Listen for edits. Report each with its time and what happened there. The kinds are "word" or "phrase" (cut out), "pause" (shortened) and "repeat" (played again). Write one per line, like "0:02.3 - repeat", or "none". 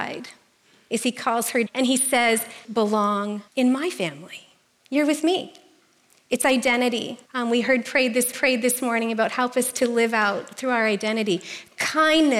0:01.7 - word
0:02.6 - word
0:03.5 - pause
0:04.7 - pause
0:07.3 - pause
0:08.3 - repeat